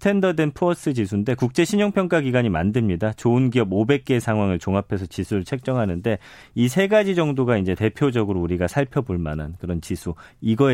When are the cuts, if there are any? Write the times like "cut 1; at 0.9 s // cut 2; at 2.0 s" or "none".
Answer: none